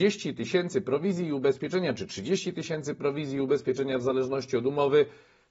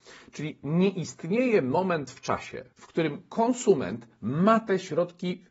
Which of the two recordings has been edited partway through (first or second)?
second